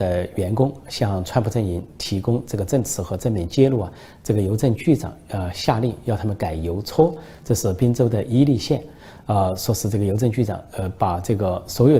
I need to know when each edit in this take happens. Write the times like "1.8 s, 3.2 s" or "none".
none